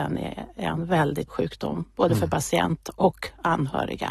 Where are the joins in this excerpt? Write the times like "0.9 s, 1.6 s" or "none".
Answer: 1.3 s